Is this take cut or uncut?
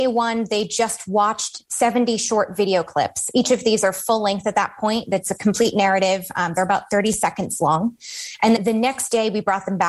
cut